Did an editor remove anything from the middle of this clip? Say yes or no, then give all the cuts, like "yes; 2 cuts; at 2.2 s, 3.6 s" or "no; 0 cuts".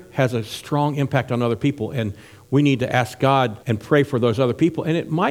yes; 1 cut; at 3.6 s